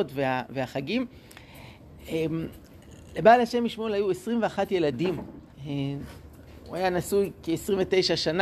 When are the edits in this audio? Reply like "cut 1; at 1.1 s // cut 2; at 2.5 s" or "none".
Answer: cut 1; at 5.5 s